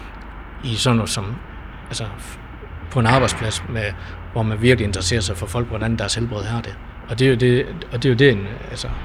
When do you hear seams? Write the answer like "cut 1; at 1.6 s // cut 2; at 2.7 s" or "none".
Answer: cut 1; at 3.6 s